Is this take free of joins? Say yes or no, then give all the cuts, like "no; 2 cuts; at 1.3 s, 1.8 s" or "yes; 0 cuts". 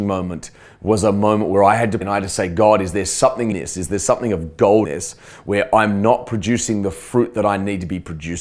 no; 3 cuts; at 2.0 s, 3.5 s, 4.8 s